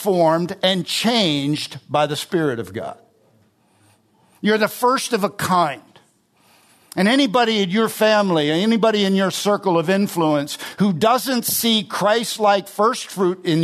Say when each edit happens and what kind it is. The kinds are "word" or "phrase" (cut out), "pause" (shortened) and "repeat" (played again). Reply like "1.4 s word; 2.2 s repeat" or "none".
none